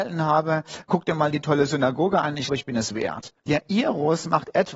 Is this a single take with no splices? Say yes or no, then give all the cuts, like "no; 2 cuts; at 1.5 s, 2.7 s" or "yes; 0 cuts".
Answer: no; 2 cuts; at 2.5 s, 3.4 s